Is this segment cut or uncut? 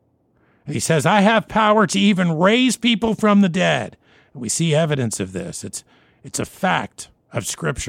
uncut